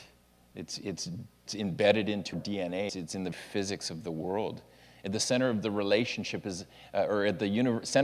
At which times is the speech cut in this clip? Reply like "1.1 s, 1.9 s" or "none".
1.5 s, 2.3 s, 2.9 s, 3.3 s